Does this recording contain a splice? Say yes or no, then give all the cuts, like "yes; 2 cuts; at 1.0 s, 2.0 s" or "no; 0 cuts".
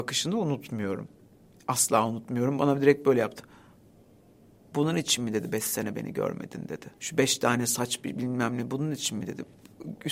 yes; 1 cut; at 7.0 s